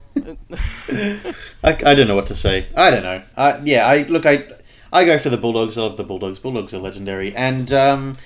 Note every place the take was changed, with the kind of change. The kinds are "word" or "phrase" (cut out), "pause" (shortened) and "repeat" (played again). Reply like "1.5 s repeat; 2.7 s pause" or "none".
none